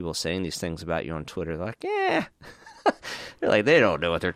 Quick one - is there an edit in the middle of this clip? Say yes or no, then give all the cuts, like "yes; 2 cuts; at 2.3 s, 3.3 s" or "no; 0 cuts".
no; 0 cuts